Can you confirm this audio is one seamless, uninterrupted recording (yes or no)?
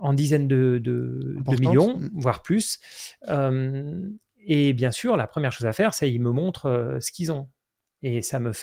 yes